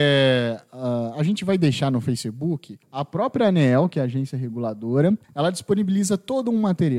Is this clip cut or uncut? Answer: cut